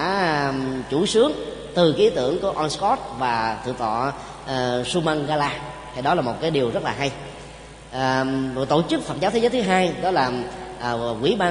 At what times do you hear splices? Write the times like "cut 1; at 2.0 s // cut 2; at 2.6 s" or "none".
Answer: none